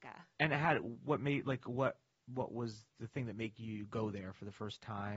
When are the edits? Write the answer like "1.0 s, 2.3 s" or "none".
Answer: 2.1 s